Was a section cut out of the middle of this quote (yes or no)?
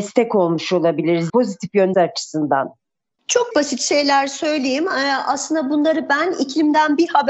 yes